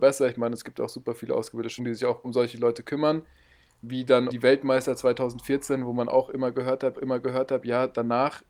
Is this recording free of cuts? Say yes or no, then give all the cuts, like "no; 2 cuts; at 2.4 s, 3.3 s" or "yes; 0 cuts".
no; 4 cuts; at 1.8 s, 2.2 s, 4.3 s, 6.9 s